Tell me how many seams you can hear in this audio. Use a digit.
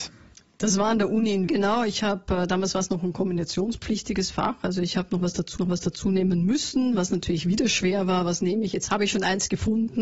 2